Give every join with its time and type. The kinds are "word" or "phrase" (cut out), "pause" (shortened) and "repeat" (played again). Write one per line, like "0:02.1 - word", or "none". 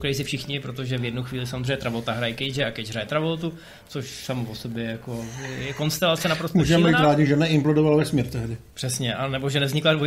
0:08.7 - pause